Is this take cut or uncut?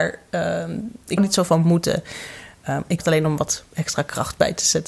cut